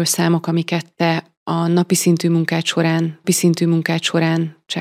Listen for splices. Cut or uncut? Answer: cut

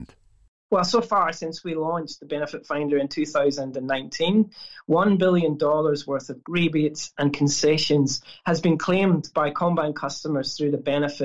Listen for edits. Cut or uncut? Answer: cut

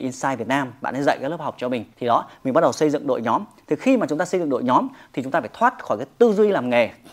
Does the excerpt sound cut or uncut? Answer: cut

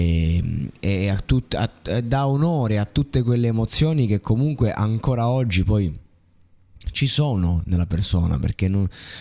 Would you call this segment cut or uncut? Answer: uncut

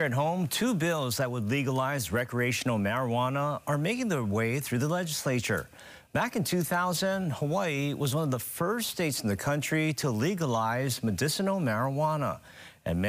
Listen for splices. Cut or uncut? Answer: uncut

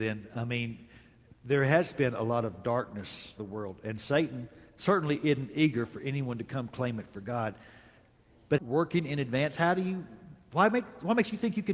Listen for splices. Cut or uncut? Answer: cut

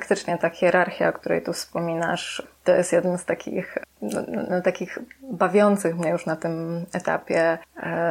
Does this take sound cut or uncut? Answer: cut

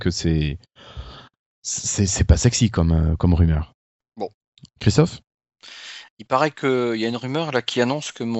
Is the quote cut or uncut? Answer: uncut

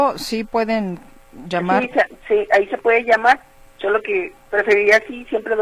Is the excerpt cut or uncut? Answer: uncut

